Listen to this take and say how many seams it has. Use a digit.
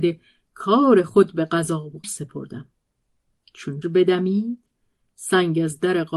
2